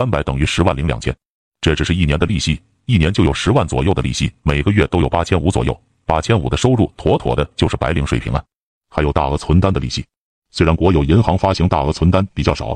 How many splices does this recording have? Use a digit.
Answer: 1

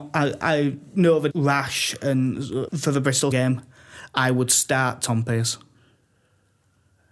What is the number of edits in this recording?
3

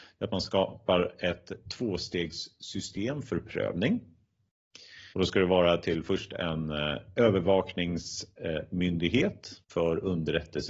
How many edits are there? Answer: 2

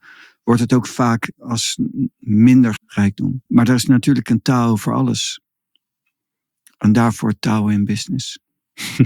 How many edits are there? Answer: 2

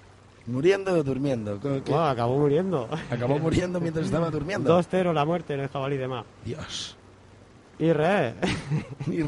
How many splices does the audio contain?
1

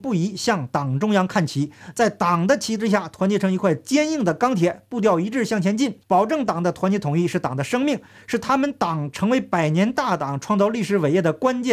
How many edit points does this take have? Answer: 1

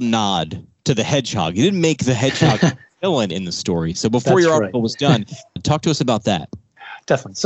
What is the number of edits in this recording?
0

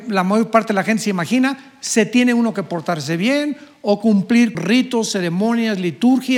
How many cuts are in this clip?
1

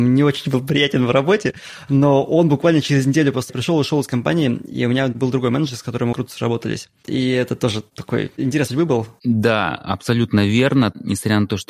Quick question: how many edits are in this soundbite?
3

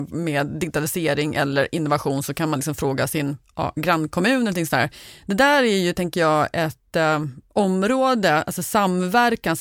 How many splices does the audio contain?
0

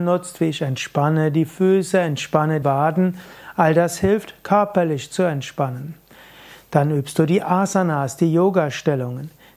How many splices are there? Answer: 1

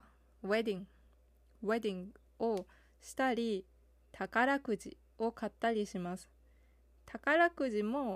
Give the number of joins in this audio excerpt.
0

